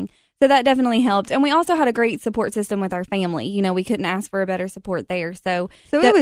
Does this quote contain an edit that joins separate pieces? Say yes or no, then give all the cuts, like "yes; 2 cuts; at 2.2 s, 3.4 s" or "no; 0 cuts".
no; 0 cuts